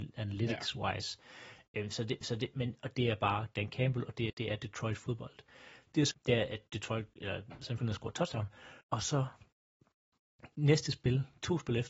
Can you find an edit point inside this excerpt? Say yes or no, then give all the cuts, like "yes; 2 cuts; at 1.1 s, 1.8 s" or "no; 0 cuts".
yes; 6 cuts; at 2.2 s, 4.3 s, 6.1 s, 7.8 s, 8.8 s, 10.5 s